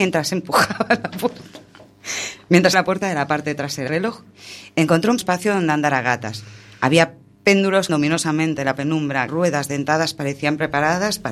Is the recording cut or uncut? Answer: cut